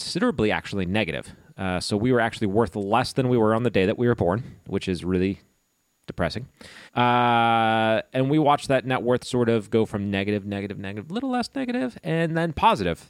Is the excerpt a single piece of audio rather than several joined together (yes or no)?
no